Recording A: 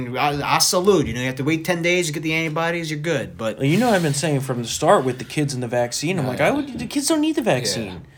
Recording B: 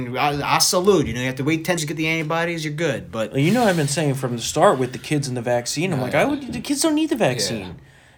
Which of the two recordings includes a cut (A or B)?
B